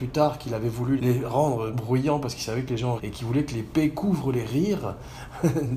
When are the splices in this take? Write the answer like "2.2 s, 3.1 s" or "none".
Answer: 1.0 s, 1.7 s, 3.0 s

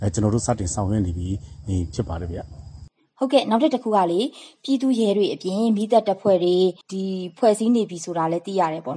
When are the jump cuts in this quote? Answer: 6.8 s

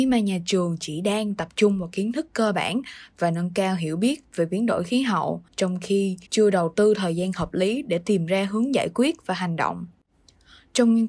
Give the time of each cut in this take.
5.5 s, 6.3 s

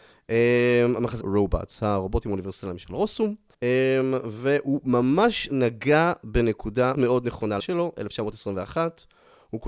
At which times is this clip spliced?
1.2 s, 3.5 s, 6.9 s, 7.6 s

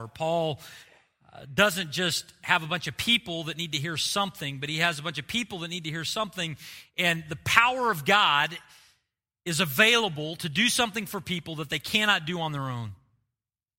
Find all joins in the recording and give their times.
none

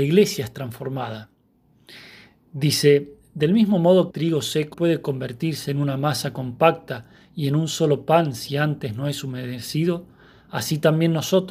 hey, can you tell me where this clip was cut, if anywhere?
4.1 s, 4.7 s

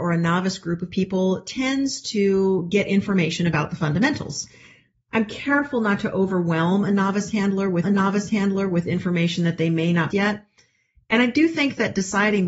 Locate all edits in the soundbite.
7.8 s, 10.1 s

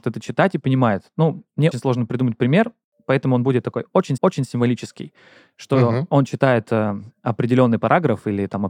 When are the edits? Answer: 1.7 s, 4.2 s

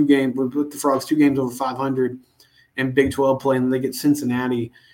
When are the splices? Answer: none

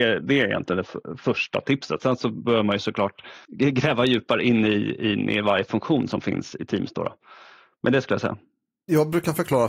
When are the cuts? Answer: 3.4 s

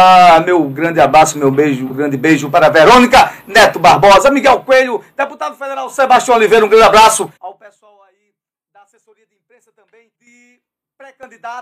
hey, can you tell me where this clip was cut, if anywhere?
1.9 s, 7.4 s, 10.1 s

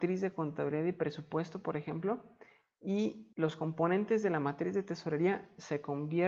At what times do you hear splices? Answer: 3.3 s

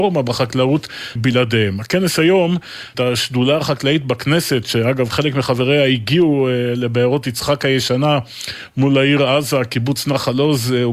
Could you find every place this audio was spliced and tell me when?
1.2 s, 2.9 s

